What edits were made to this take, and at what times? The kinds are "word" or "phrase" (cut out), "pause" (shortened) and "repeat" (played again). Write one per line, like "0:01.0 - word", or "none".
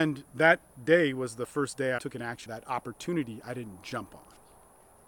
0:02.0 - word
0:02.5 - word